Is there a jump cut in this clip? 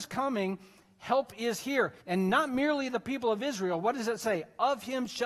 yes; 1 cut; at 2.0 s

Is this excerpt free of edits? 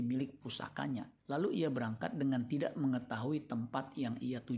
no; 1 cut; at 1.2 s

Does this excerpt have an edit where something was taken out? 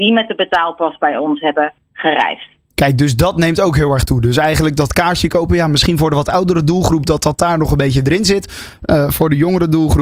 no; 0 cuts

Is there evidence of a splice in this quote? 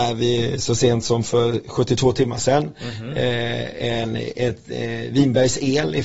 no; 0 cuts

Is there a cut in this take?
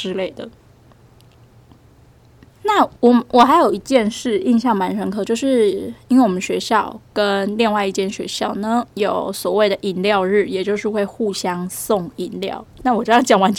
yes; 2 cuts; at 3.0 s, 8.9 s

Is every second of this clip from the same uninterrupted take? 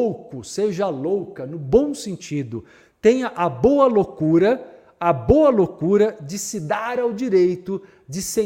yes; 0 cuts

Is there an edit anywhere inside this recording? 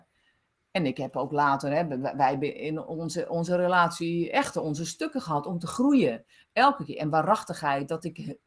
no; 0 cuts

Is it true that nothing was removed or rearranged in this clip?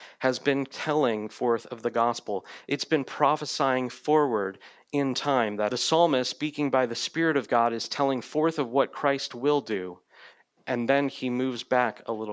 no; 1 cut; at 5.7 s

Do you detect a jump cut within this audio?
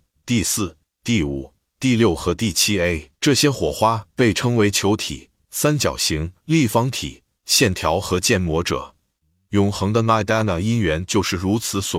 yes; 2 cuts; at 3.2 s, 6.4 s

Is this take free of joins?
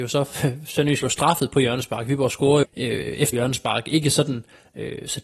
no; 3 cuts; at 1.0 s, 2.6 s, 3.3 s

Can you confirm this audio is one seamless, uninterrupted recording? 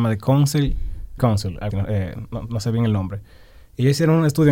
no; 2 cuts; at 1.2 s, 1.7 s

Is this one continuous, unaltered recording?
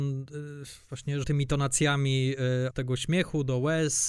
no; 2 cuts; at 1.2 s, 2.7 s

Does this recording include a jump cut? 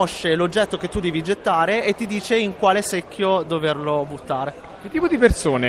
no; 0 cuts

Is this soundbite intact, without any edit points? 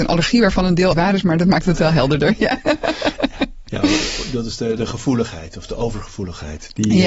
no; 2 cuts; at 0.9 s, 4.8 s

